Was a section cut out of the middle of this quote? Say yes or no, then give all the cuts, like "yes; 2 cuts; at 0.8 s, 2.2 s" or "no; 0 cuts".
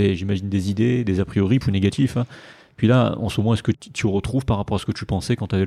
yes; 2 cuts; at 1.6 s, 3.7 s